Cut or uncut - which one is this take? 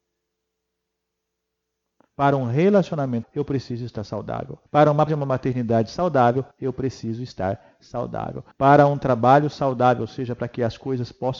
cut